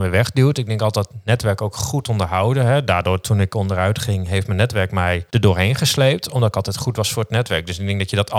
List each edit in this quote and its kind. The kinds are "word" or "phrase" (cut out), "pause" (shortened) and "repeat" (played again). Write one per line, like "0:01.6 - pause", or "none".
0:05.3 - pause